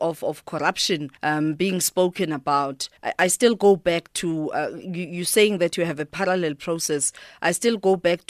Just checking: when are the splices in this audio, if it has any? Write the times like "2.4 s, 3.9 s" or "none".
1.2 s, 3.0 s